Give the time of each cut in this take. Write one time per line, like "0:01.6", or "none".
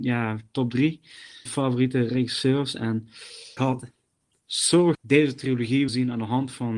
0:01.5
0:03.6
0:04.9
0:05.9